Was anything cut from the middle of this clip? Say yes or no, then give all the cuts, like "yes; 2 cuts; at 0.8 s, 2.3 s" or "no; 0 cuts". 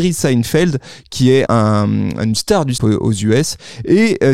yes; 2 cuts; at 1.5 s, 2.8 s